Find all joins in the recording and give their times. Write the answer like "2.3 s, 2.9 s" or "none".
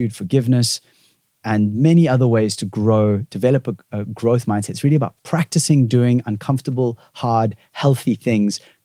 5.2 s